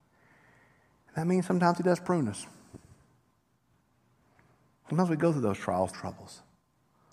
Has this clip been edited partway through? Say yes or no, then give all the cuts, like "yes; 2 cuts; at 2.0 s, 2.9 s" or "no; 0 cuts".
yes; 1 cut; at 5.9 s